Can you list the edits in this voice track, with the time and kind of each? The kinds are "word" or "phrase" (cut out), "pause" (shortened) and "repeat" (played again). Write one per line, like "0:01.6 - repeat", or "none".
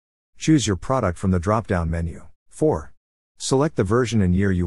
0:02.4 - pause